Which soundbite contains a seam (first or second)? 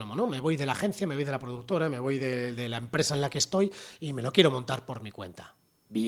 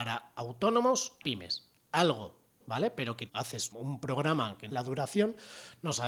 second